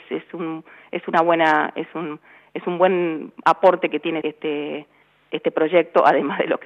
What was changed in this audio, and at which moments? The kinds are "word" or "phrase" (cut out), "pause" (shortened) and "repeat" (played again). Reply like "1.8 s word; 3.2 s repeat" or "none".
4.2 s word